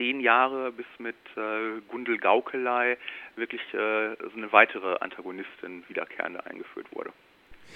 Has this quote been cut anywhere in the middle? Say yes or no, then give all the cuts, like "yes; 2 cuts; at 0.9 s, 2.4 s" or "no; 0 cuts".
no; 0 cuts